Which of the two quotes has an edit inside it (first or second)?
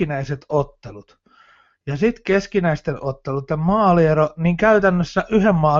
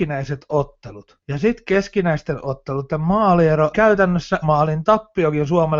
second